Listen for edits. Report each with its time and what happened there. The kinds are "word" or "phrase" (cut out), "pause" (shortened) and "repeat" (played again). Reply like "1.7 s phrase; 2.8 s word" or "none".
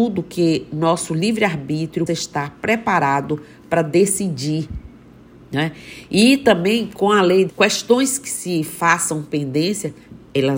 2.1 s word; 5.3 s pause; 7.5 s word